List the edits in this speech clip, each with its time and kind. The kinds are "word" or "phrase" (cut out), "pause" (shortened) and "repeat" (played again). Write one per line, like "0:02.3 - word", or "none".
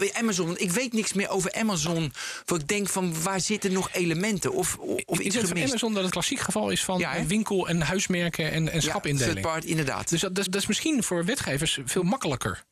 0:05.2 - word
0:06.1 - phrase
0:10.5 - repeat
0:11.0 - word

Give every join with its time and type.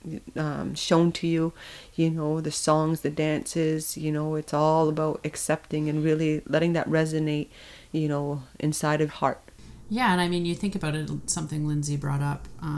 0:09.1 - word

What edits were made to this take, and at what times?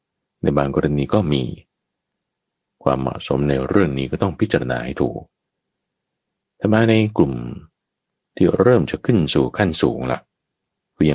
none

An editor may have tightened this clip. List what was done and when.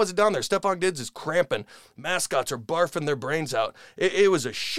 none

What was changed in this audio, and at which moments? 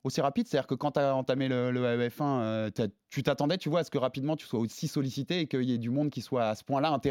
none

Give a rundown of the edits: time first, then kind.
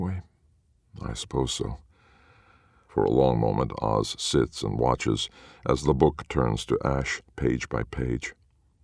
none

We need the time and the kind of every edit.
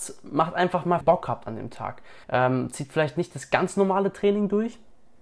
0:01.0 - phrase
0:02.2 - pause

